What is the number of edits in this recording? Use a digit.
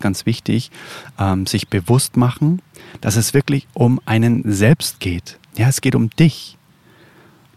1